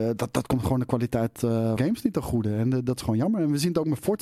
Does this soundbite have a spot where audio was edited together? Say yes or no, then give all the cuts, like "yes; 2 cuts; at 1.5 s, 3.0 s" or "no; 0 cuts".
yes; 1 cut; at 1.8 s